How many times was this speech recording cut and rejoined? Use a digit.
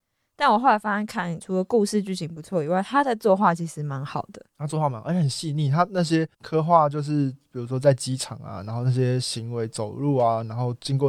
2